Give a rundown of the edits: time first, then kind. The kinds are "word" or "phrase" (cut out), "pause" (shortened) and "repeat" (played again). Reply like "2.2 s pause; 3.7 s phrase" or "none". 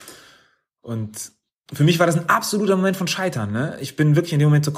none